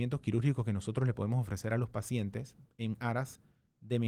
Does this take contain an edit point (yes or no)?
no